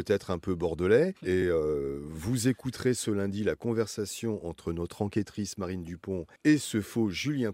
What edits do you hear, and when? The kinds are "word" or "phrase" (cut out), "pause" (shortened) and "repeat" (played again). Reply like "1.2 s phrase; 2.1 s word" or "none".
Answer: none

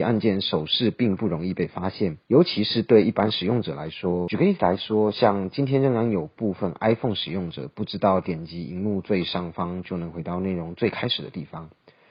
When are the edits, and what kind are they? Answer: 2.2 s pause

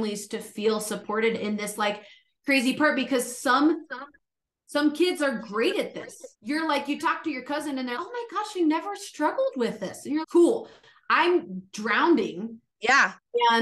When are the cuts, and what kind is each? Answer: 6.3 s pause; 8.0 s word; 10.2 s word

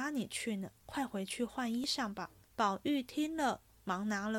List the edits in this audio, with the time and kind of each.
2.5 s pause

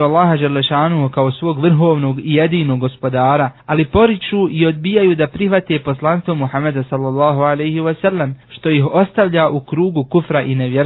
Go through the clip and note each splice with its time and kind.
3.6 s pause; 8.4 s pause

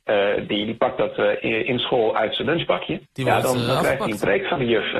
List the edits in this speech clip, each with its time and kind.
3.1 s pause

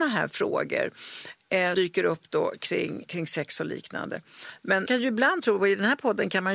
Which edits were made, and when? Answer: 1.7 s word; 3.1 s word; 4.9 s word

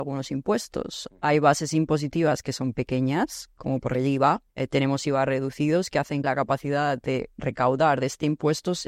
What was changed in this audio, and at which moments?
3.9 s word; 4.5 s pause; 6.2 s word

